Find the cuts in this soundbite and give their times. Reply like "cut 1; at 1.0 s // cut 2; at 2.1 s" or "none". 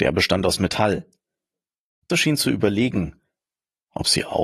cut 1; at 2.1 s